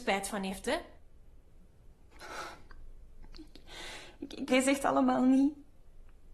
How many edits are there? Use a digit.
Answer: 1